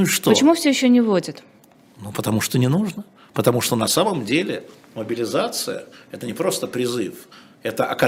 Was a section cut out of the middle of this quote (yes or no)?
no